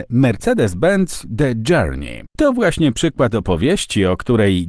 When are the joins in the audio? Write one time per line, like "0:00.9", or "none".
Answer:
0:02.3

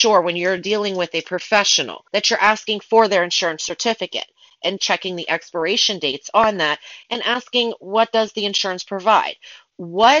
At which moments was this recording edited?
0:02.1
0:04.8

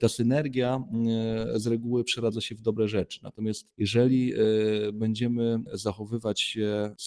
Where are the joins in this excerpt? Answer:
none

